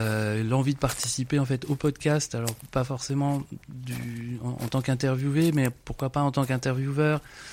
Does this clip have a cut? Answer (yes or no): no